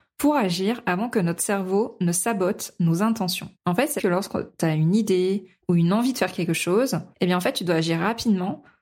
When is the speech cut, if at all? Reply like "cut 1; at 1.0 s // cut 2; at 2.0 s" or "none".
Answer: cut 1; at 3.5 s // cut 2; at 4.0 s // cut 3; at 7.1 s